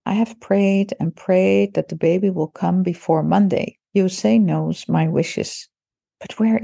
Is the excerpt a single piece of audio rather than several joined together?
no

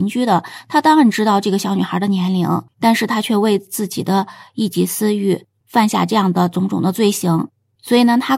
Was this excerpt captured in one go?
no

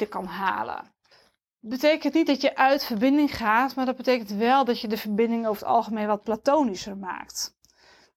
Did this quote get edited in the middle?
yes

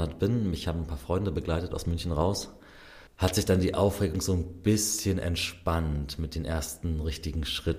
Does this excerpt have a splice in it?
yes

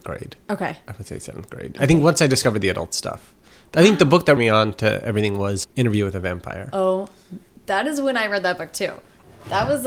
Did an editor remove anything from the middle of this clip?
yes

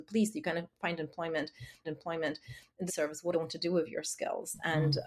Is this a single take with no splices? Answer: no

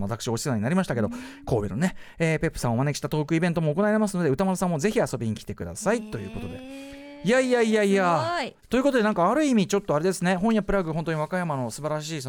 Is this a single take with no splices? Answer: no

